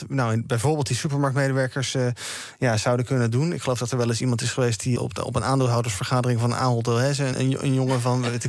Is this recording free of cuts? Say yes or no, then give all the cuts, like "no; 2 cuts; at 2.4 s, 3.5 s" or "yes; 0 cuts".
no; 2 cuts; at 5.0 s, 7.3 s